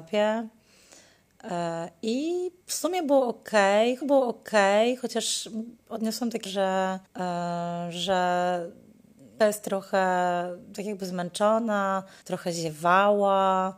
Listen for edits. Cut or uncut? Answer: cut